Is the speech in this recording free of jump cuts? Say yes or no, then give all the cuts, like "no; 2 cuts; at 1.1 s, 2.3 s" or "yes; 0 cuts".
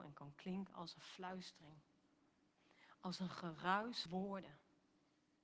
no; 1 cut; at 4.1 s